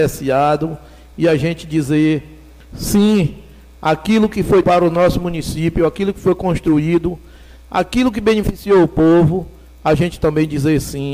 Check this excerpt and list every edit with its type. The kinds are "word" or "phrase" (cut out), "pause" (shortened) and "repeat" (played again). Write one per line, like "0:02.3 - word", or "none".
0:04.6 - word